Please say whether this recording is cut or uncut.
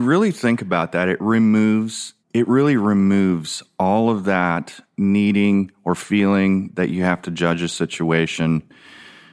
cut